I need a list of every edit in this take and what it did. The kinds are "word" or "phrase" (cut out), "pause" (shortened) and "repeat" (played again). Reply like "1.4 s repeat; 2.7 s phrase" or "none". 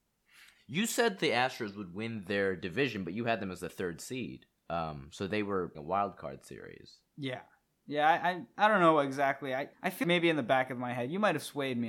4.6 s pause; 5.8 s word; 7.0 s pause; 9.7 s pause; 10.0 s word